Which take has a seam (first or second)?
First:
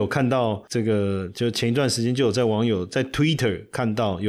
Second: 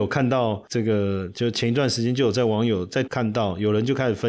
second